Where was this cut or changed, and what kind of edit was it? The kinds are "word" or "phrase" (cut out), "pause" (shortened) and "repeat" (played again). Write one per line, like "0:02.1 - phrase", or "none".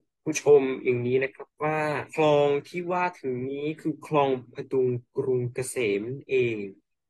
0:02.1 - pause